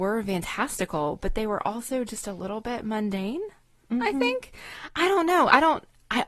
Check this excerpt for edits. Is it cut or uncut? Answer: uncut